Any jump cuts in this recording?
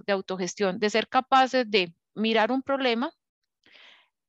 no; 0 cuts

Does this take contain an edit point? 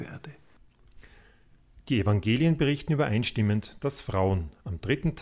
no; 0 cuts

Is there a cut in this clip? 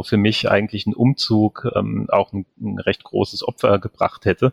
no; 0 cuts

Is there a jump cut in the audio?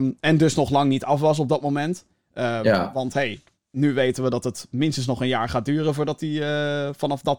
no; 0 cuts

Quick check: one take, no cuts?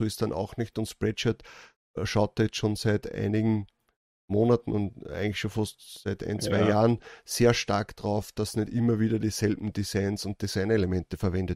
yes; 0 cuts

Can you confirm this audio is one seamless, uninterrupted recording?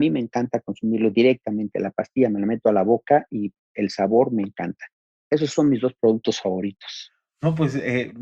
yes; 0 cuts

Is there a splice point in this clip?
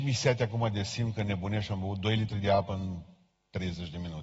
no; 0 cuts

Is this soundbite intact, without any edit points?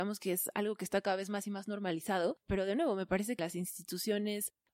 no; 2 cuts; at 2.4 s, 3.4 s

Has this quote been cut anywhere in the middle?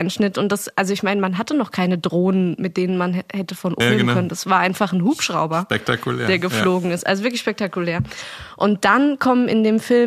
yes; 1 cut; at 3.8 s

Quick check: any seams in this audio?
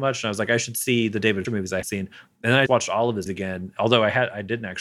yes; 4 cuts; at 1.4 s, 1.8 s, 2.7 s, 3.3 s

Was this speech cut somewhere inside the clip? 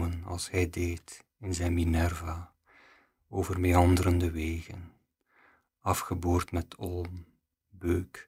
no; 0 cuts

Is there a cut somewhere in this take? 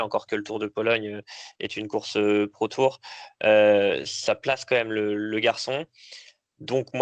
no; 0 cuts

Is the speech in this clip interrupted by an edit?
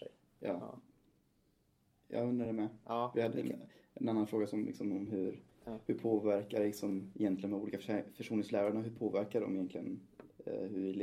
no; 0 cuts

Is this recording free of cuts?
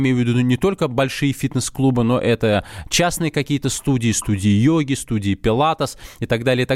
yes; 0 cuts

